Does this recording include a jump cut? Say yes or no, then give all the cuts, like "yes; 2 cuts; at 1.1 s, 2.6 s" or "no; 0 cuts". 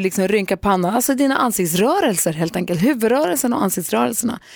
no; 0 cuts